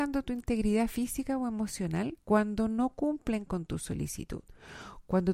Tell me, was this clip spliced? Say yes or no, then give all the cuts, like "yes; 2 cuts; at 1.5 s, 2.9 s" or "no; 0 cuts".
yes; 1 cut; at 2.2 s